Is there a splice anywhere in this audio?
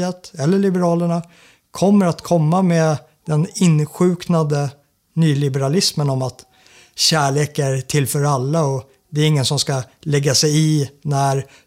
no; 0 cuts

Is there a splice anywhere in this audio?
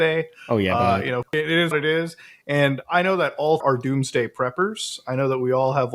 yes; 3 cuts; at 1.3 s, 1.7 s, 3.6 s

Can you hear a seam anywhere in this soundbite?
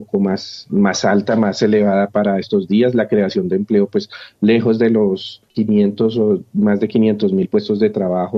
yes; 1 cut; at 5.5 s

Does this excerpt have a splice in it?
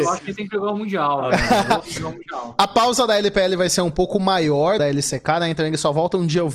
yes; 2 cuts; at 1.8 s, 4.8 s

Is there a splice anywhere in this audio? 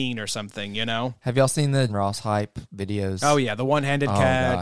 yes; 1 cut; at 1.9 s

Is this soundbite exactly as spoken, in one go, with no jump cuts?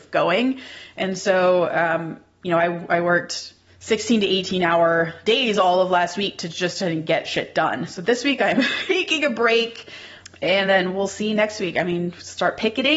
yes; 0 cuts

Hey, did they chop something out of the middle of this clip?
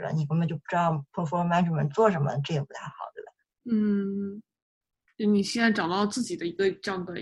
no; 0 cuts

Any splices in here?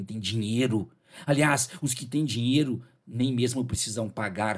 no; 0 cuts

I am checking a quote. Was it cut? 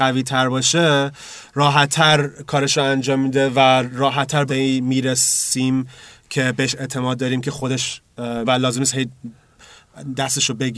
yes; 2 cuts; at 4.5 s, 8.4 s

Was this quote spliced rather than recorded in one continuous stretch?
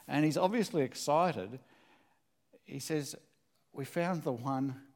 no; 0 cuts

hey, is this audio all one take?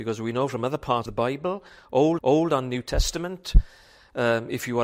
no; 2 cuts; at 1.1 s, 2.2 s

